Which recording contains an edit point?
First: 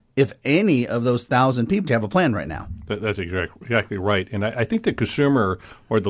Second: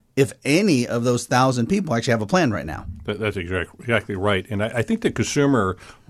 first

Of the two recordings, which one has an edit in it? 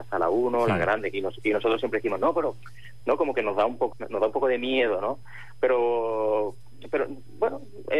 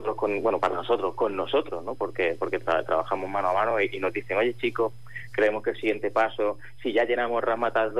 first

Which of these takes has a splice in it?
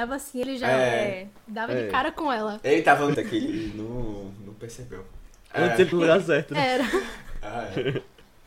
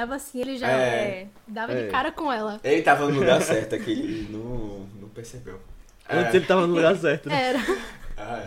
first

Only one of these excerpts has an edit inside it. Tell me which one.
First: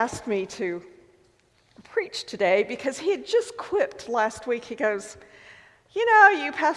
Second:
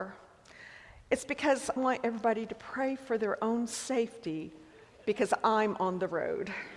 second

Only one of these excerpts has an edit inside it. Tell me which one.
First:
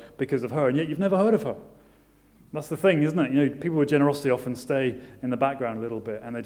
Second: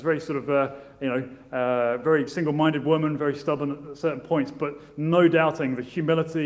second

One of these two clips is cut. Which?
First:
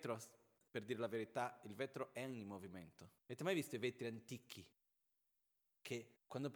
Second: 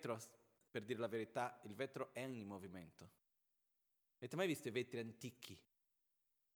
first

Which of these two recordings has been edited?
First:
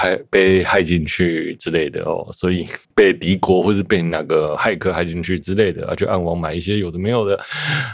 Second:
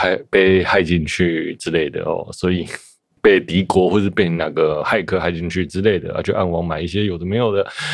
first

